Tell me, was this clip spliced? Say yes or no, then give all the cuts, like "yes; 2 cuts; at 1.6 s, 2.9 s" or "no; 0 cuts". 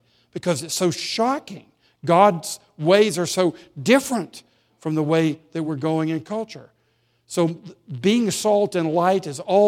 no; 0 cuts